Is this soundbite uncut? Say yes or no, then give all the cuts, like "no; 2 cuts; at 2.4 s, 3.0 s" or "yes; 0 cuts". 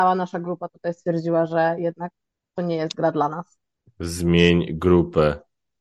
yes; 0 cuts